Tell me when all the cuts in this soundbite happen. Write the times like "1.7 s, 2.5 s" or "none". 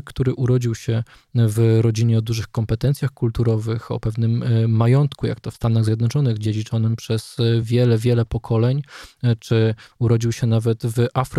none